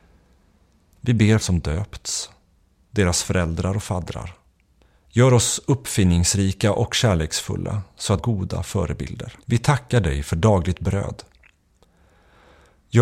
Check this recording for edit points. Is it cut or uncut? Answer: cut